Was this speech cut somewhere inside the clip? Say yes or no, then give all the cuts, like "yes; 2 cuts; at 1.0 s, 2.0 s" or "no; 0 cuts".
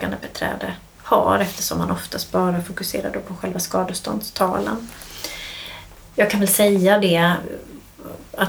no; 0 cuts